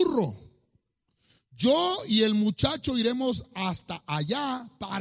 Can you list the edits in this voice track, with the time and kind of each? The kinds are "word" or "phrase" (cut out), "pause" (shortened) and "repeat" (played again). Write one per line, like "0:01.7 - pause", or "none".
none